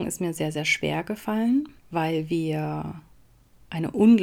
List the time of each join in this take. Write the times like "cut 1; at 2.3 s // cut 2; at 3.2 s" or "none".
cut 1; at 1.8 s

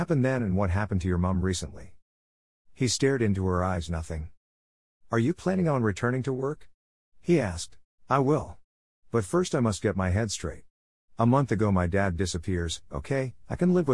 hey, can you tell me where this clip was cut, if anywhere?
cut 1; at 7.9 s

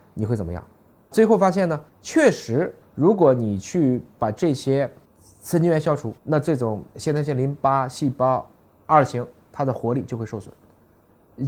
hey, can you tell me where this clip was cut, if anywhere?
cut 1; at 6.2 s

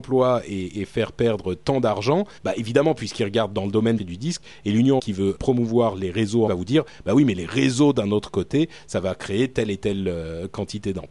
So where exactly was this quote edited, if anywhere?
cut 1; at 2.4 s // cut 2; at 4.0 s // cut 3; at 5.0 s // cut 4; at 5.4 s // cut 5; at 6.5 s

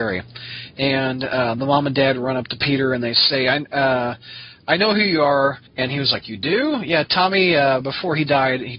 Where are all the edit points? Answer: cut 1; at 5.7 s

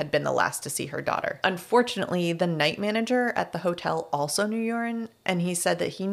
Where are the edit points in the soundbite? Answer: none

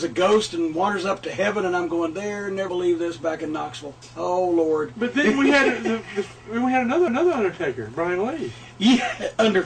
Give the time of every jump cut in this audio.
cut 1; at 2.7 s // cut 2; at 4.0 s // cut 3; at 7.1 s

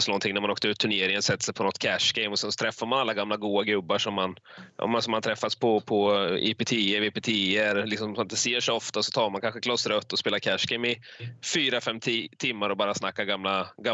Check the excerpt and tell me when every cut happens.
none

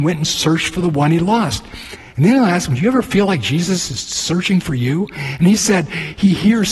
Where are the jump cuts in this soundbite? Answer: none

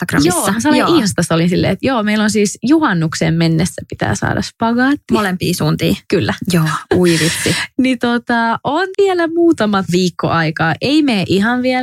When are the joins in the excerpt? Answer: cut 1; at 8.9 s

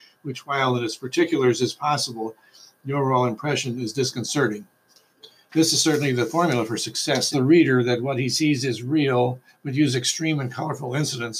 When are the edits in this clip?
cut 1; at 7.3 s

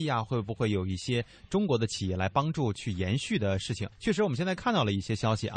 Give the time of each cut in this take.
cut 1; at 3.9 s

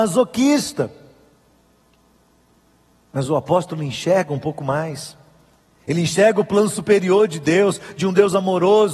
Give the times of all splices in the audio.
none

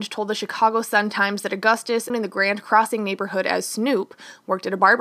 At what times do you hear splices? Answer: cut 1; at 2.1 s

